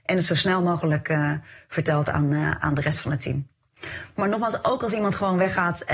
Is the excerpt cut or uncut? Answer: uncut